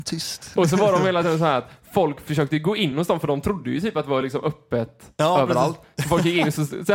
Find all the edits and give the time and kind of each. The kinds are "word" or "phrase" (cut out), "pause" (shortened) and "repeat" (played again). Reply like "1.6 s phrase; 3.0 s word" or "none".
none